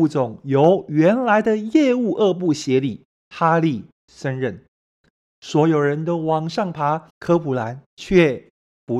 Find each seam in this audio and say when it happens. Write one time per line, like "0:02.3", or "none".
0:07.1